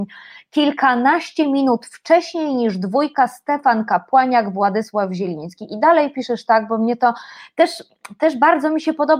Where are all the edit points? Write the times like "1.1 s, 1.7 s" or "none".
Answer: none